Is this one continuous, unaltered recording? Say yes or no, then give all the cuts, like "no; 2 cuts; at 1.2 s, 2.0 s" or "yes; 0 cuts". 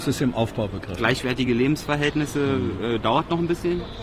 yes; 0 cuts